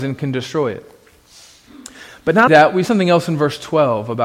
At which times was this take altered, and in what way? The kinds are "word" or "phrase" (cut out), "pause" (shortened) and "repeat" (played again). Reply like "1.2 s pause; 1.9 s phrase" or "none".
2.5 s word; 2.9 s word